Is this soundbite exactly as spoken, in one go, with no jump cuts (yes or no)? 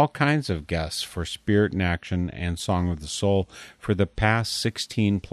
yes